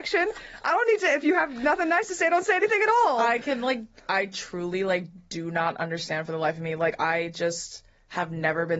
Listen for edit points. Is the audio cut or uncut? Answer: uncut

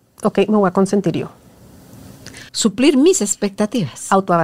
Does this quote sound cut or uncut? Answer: cut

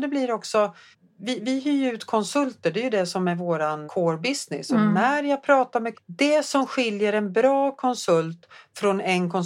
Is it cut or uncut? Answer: cut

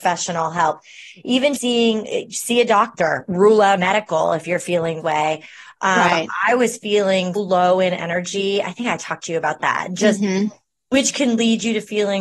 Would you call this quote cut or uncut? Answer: cut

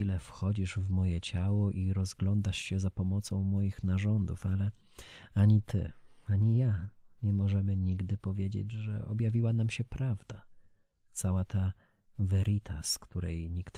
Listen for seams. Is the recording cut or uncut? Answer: uncut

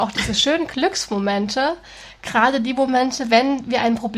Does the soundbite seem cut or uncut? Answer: uncut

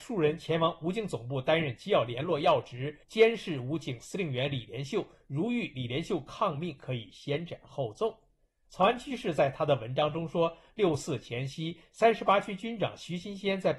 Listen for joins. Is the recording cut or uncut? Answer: cut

